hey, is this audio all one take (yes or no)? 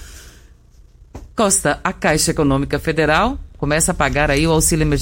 no